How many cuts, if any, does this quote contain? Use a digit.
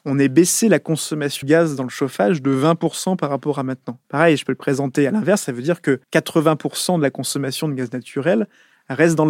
3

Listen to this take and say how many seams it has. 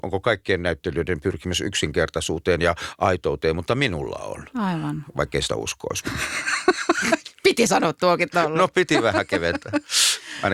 1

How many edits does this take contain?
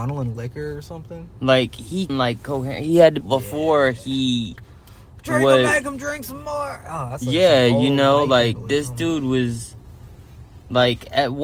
2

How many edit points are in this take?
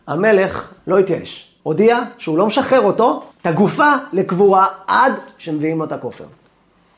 2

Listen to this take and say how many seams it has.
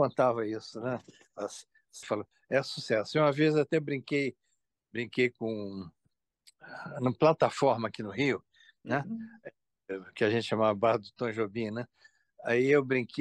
1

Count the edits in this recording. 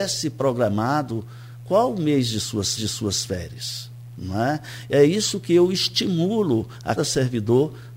2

